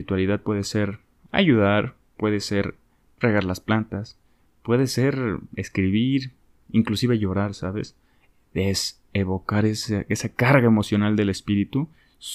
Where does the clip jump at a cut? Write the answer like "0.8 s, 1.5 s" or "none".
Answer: none

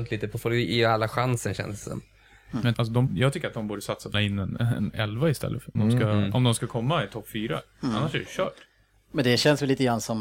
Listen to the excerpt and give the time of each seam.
2.7 s, 3.1 s, 4.1 s, 5.8 s

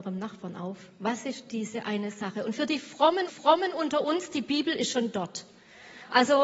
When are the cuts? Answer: 3.3 s

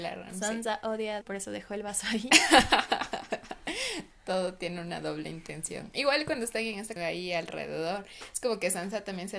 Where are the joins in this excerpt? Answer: 1.2 s, 7.0 s

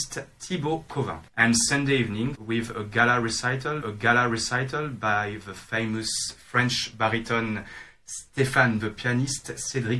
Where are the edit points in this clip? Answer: 1.3 s, 2.3 s, 3.8 s, 8.8 s

